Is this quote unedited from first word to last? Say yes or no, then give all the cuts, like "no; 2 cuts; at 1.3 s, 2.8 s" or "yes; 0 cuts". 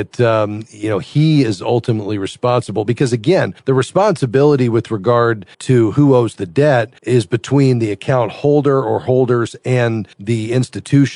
no; 4 cuts; at 3.6 s, 5.5 s, 7.0 s, 10.1 s